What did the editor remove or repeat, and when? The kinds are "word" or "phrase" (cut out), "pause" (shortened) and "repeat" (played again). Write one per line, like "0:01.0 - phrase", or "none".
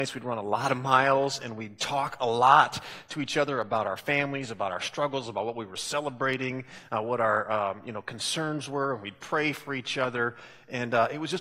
none